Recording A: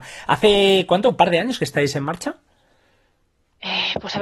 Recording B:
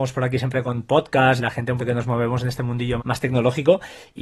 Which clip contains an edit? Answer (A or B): B